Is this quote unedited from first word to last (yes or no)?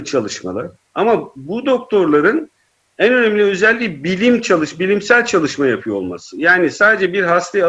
yes